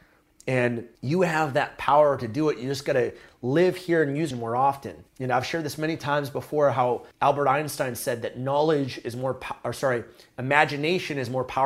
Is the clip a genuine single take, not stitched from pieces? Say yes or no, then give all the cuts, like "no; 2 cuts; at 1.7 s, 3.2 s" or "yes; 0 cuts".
no; 4 cuts; at 1.0 s, 4.3 s, 5.1 s, 7.1 s